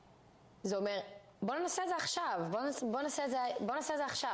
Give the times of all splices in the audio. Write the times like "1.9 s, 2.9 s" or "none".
1.4 s